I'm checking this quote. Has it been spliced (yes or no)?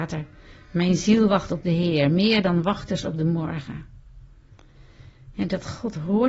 no